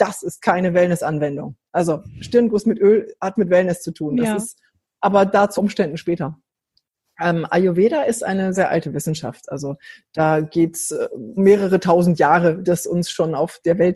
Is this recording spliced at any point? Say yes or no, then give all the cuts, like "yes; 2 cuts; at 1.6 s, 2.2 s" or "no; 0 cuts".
yes; 5 cuts; at 3.4 s, 5.6 s, 8.5 s, 11.4 s, 12.6 s